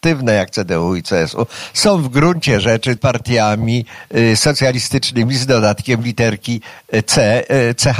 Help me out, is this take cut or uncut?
cut